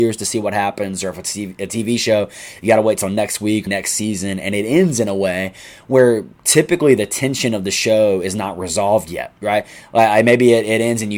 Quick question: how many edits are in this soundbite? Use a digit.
3